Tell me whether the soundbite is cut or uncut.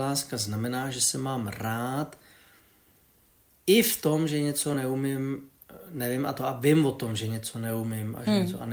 uncut